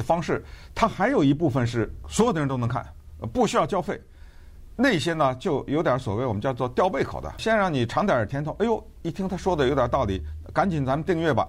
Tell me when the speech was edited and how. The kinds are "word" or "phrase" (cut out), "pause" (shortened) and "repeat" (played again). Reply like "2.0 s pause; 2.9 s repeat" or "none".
7.4 s phrase